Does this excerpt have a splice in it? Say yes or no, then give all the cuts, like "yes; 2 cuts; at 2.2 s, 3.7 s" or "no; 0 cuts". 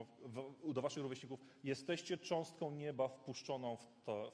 no; 0 cuts